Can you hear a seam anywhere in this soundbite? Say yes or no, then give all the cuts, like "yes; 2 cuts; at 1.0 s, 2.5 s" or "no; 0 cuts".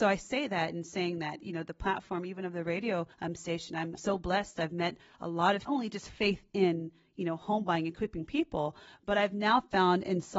yes; 3 cuts; at 3.1 s, 4.0 s, 5.7 s